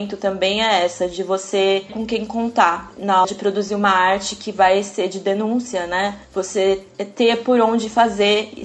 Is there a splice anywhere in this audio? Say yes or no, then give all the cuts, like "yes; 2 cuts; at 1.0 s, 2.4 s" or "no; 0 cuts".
yes; 2 cuts; at 1.9 s, 3.2 s